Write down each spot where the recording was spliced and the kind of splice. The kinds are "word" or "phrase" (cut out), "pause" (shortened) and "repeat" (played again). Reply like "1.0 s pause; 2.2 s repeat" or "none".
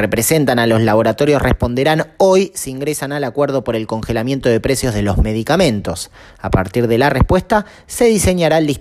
none

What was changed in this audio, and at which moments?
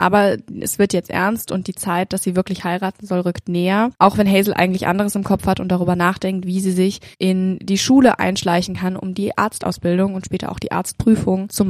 3.9 s pause; 7.1 s pause

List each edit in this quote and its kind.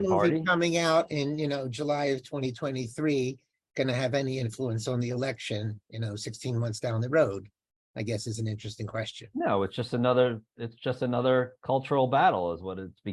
none

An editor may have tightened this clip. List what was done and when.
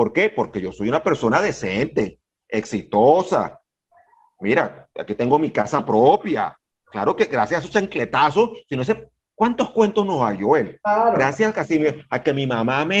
none

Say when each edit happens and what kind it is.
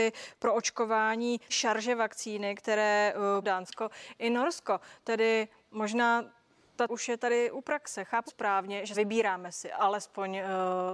1.5 s word; 3.4 s word; 6.9 s word; 8.3 s word; 8.9 s phrase

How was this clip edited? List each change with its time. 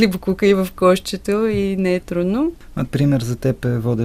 2.0 s word; 2.9 s phrase

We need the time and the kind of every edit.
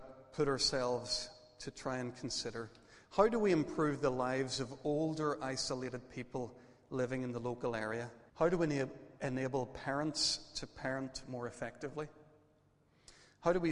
8.3 s pause

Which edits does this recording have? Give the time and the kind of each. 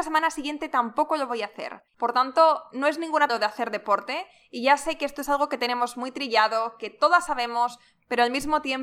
1.9 s pause; 3.3 s word

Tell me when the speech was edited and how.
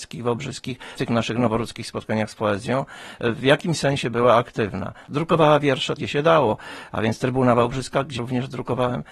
1.0 s word; 6.0 s word; 8.2 s word

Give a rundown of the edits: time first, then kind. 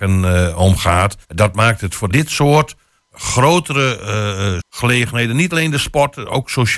1.2 s pause; 2.1 s phrase; 4.6 s word

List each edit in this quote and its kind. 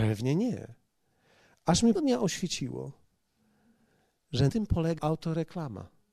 1.9 s word; 4.5 s word; 5.0 s word

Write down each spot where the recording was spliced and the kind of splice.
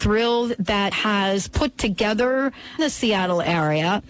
0.9 s word; 2.8 s phrase

